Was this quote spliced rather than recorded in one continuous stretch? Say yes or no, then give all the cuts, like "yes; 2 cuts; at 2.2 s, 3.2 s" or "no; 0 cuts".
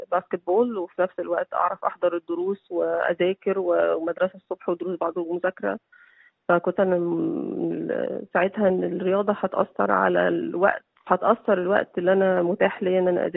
yes; 3 cuts; at 5.1 s, 6.8 s, 11.1 s